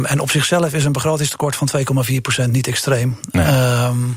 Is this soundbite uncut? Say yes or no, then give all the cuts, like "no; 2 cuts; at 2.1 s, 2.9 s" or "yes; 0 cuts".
yes; 0 cuts